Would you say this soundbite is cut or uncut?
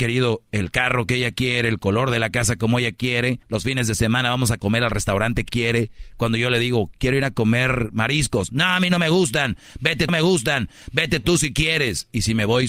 cut